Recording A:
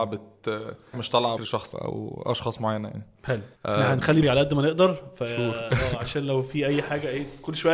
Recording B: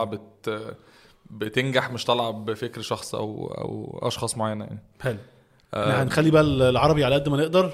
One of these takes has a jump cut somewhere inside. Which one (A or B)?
A